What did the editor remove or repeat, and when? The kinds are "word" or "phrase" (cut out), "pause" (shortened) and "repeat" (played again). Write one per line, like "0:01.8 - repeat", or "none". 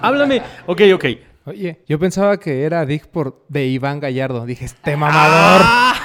0:01.0 - word
0:01.8 - pause